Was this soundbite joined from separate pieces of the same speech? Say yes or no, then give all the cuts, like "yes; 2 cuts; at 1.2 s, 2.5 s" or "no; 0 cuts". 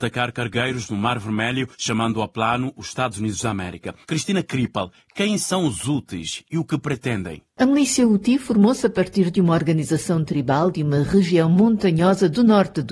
yes; 3 cuts; at 1.7 s, 4.0 s, 7.5 s